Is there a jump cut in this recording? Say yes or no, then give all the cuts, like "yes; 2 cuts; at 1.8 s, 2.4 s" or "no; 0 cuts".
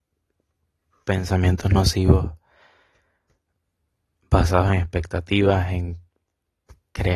no; 0 cuts